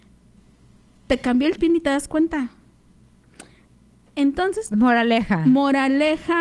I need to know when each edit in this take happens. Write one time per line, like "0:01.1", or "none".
0:01.6